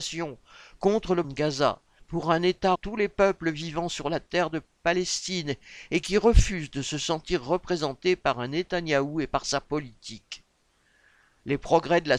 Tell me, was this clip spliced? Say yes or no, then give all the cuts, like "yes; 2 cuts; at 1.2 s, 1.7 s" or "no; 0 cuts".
yes; 3 cuts; at 1.2 s, 2.0 s, 2.7 s